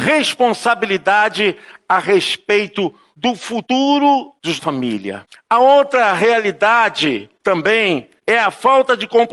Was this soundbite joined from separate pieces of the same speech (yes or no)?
yes